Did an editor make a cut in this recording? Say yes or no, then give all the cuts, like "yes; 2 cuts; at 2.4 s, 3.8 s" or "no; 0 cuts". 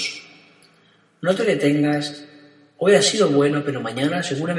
no; 0 cuts